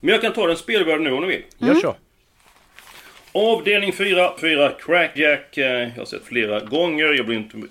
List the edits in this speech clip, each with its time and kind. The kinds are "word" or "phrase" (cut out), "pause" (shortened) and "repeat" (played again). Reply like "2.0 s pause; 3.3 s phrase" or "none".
4.4 s word; 5.2 s word; 6.2 s word